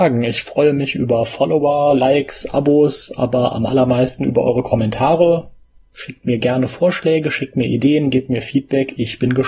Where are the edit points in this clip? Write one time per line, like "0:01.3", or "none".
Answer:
none